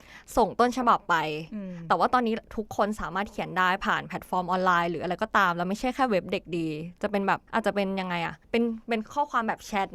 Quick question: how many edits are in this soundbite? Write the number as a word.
two